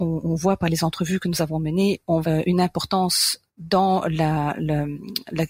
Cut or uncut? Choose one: cut